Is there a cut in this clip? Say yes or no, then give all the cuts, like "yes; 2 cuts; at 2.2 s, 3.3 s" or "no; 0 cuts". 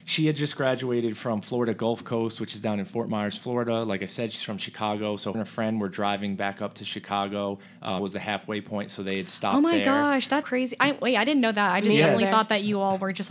yes; 3 cuts; at 5.3 s, 8.0 s, 10.4 s